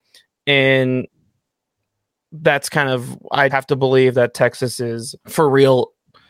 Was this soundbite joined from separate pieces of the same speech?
yes; 2 cuts; at 3.5 s, 5.2 s

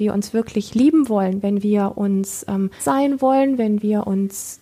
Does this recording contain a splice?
yes; 1 cut; at 2.8 s

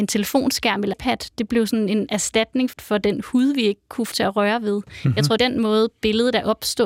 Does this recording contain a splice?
yes; 4 cuts; at 0.9 s, 2.7 s, 4.1 s, 5.4 s

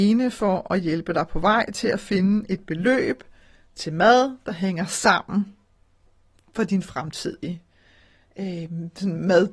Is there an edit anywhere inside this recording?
no; 0 cuts

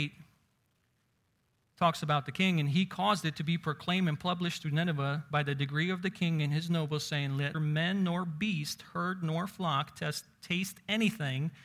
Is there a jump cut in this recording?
yes; 1 cut; at 7.5 s

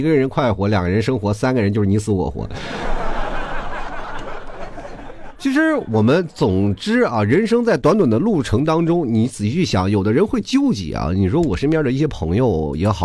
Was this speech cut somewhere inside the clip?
no; 0 cuts

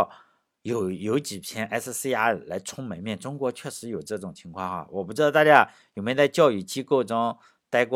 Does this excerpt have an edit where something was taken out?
no; 0 cuts

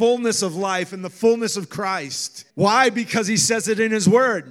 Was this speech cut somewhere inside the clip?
yes; 1 cut; at 2.5 s

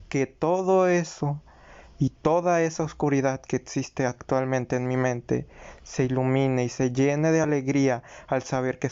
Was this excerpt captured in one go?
yes; 0 cuts

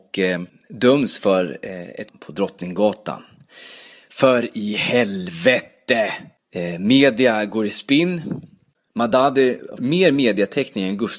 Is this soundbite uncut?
no; 2 cuts; at 2.1 s, 9.8 s

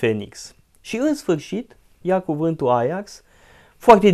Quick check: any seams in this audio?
no; 0 cuts

